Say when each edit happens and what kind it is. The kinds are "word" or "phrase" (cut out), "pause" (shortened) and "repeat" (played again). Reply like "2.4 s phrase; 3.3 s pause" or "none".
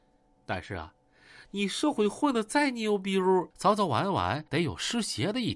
3.5 s pause; 4.5 s pause